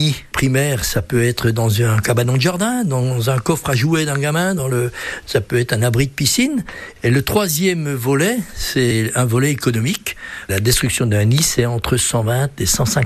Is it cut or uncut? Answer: uncut